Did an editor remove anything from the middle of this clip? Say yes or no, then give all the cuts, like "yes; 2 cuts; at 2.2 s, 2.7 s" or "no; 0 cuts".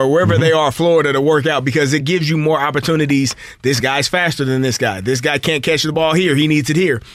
no; 0 cuts